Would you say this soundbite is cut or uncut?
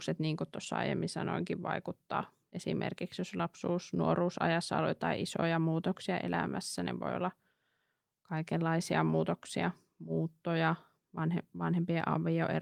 uncut